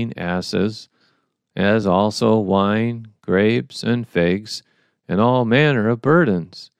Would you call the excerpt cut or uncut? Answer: uncut